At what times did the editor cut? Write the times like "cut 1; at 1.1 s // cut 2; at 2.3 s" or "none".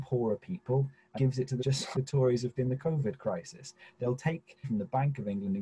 cut 1; at 1.2 s // cut 2; at 1.6 s // cut 3; at 1.9 s // cut 4; at 2.6 s // cut 5; at 4.6 s